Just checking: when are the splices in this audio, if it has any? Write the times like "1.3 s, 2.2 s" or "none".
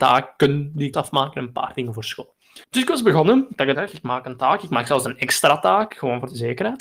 0.9 s, 2.6 s, 3.7 s